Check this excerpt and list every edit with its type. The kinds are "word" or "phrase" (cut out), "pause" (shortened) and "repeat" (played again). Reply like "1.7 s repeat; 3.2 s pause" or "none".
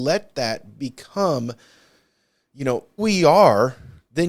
3.0 s word